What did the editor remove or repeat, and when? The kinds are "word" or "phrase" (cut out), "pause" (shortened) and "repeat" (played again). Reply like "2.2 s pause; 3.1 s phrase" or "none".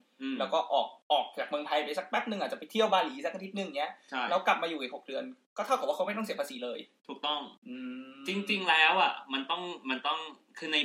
1.0 s pause; 7.6 s pause